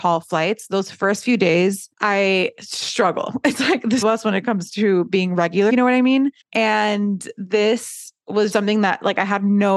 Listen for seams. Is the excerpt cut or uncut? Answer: cut